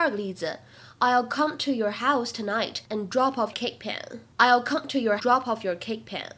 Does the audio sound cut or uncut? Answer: cut